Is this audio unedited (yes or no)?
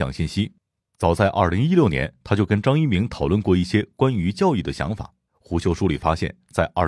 no